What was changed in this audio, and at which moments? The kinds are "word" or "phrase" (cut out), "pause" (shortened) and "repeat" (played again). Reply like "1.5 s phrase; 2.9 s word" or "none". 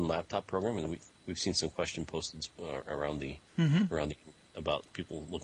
1.2 s pause; 3.5 s pause